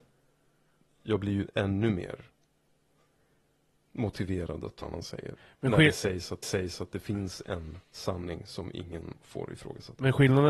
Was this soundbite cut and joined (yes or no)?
yes